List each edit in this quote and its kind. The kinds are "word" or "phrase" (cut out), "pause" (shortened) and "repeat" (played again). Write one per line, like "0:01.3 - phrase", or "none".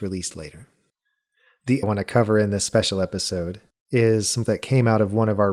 0:01.8 - phrase
0:04.4 - word